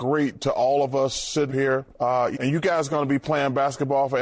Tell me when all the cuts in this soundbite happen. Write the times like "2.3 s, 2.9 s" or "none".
1.5 s, 1.9 s, 2.3 s

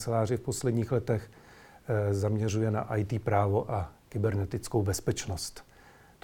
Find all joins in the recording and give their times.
none

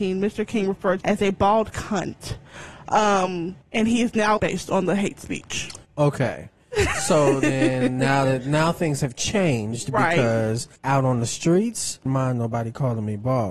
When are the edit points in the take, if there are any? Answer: 1.0 s, 3.6 s, 4.4 s, 5.8 s, 10.8 s, 12.1 s

